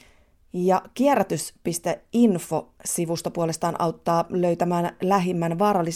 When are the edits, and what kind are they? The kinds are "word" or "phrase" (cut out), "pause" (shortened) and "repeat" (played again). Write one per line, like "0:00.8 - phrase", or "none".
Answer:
none